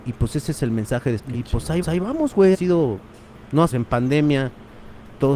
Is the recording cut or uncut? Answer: cut